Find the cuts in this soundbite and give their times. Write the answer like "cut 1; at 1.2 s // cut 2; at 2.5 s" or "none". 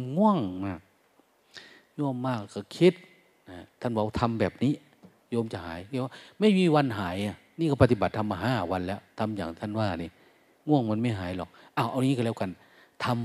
none